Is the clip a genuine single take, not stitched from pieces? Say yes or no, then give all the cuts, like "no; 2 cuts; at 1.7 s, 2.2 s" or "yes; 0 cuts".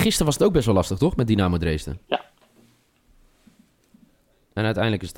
no; 1 cut; at 2.0 s